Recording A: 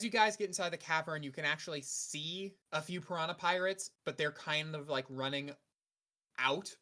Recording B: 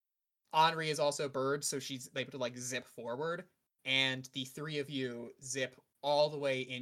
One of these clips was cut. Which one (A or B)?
A